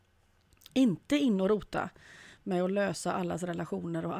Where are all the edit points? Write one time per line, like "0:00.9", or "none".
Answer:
none